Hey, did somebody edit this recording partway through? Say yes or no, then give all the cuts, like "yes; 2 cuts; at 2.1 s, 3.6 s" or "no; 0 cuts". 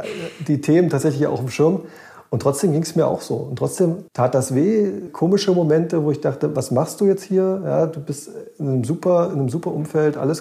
yes; 2 cuts; at 4.1 s, 5.1 s